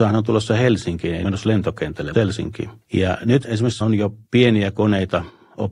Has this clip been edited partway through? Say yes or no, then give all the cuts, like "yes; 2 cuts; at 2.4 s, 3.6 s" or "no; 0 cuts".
yes; 6 cuts; at 1.2 s, 2.1 s, 2.8 s, 3.4 s, 3.8 s, 4.2 s